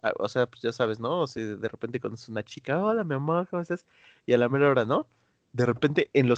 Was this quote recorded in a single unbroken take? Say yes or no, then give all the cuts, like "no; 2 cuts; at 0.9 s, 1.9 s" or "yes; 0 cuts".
yes; 0 cuts